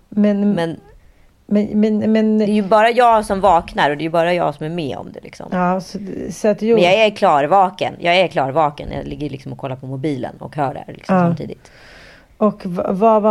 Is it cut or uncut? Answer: uncut